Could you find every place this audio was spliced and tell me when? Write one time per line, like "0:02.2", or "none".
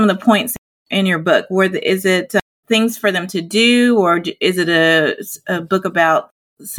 0:02.6

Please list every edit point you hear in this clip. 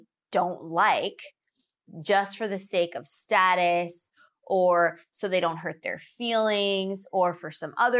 none

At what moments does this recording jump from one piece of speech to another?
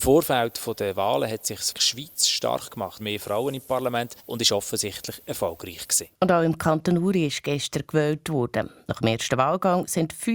0:01.7
0:03.0
0:04.2
0:06.1

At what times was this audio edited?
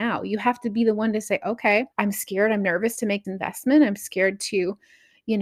0:01.9
0:03.2

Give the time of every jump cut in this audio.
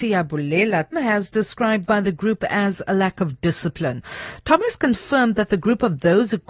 0:00.9
0:01.9

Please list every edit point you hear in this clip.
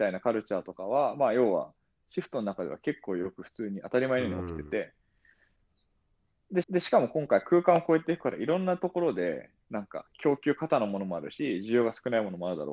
0:06.6

